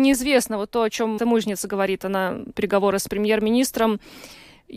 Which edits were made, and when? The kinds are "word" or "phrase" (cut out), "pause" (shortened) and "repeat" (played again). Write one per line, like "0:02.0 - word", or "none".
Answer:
0:01.2 - word
0:02.5 - word
0:03.1 - phrase